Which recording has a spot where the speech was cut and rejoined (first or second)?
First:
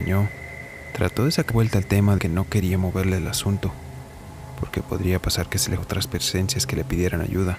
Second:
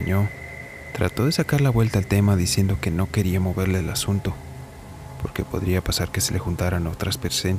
first